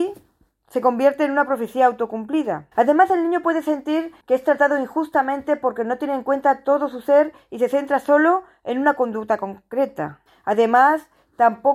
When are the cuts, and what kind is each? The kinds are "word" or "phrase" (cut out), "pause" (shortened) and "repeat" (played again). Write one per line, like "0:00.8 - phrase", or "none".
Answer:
0:02.7 - pause
0:04.2 - pause
0:10.3 - pause